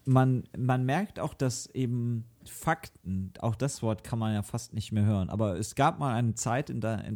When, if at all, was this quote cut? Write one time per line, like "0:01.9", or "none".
none